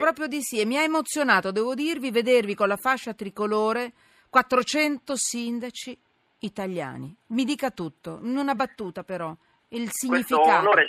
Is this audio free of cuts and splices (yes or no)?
yes